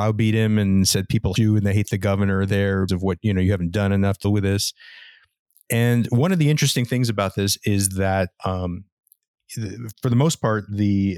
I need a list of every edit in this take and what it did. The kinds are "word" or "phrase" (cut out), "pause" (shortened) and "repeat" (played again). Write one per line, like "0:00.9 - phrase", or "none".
0:01.4 - word
0:02.9 - word
0:04.2 - word
0:09.9 - word

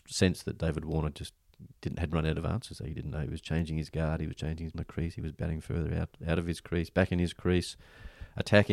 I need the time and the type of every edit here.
0:04.7 - phrase

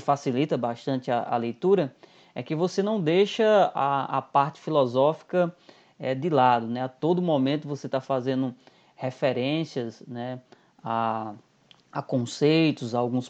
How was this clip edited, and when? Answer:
none

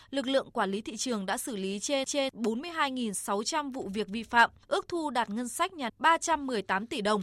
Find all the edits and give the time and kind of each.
0:02.1 - repeat
0:05.9 - word

